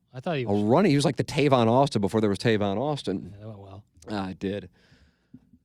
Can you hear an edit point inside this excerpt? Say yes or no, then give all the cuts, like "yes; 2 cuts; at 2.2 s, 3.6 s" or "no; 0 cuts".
no; 0 cuts